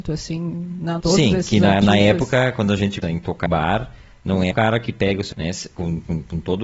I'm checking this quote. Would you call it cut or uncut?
cut